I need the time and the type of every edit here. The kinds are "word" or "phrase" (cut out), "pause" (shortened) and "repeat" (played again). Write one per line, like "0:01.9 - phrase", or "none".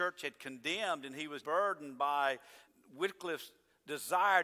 0:01.4 - word
0:02.7 - pause